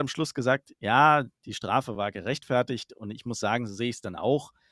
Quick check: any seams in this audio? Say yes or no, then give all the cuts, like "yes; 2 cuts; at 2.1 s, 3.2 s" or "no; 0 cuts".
no; 0 cuts